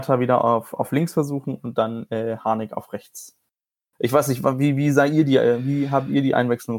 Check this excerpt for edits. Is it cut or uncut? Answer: uncut